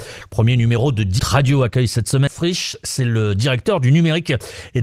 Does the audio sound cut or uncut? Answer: cut